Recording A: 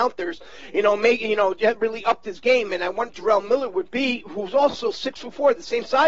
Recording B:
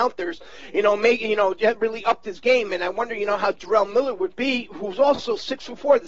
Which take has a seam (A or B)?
A